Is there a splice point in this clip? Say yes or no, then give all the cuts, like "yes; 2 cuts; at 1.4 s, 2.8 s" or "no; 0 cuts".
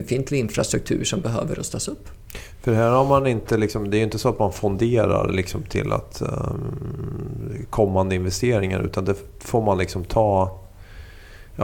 no; 0 cuts